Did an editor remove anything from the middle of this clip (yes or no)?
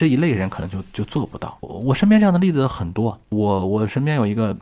yes